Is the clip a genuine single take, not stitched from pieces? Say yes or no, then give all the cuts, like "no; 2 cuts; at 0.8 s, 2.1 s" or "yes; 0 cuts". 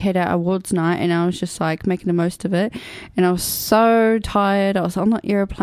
yes; 0 cuts